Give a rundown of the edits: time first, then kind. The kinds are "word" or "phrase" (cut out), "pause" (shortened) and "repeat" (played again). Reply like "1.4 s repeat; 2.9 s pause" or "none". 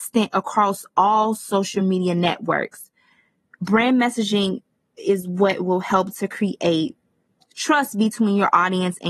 none